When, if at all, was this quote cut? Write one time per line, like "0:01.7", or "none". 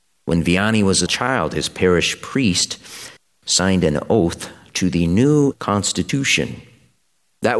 0:01.1
0:03.2
0:05.5